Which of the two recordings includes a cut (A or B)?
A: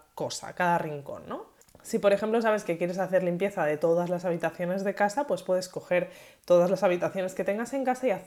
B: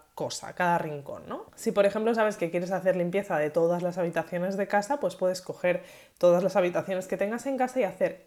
B